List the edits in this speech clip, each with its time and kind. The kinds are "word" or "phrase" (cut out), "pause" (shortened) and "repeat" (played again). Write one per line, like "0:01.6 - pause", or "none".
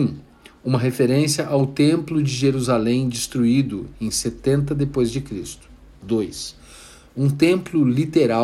none